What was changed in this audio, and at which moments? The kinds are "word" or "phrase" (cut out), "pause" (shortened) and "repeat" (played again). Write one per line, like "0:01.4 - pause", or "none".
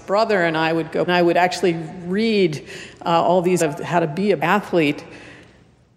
0:01.1 - phrase
0:03.6 - phrase
0:04.4 - word